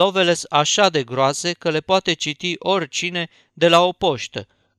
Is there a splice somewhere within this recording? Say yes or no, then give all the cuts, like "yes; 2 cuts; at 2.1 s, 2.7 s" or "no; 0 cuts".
no; 0 cuts